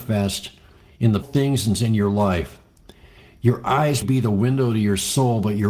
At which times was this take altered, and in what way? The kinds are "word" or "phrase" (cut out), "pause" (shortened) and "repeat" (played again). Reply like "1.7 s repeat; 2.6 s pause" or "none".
1.2 s word; 1.7 s word; 4.0 s word